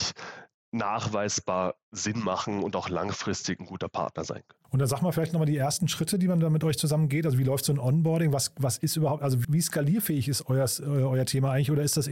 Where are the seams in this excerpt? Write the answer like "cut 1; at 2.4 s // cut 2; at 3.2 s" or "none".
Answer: cut 1; at 4.6 s // cut 2; at 9.4 s